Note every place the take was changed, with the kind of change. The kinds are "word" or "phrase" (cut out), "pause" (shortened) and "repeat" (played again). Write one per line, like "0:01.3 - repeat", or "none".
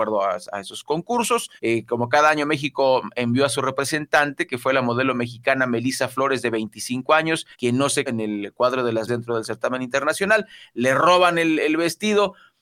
0:01.6 - pause
0:07.5 - pause
0:08.1 - word
0:09.1 - word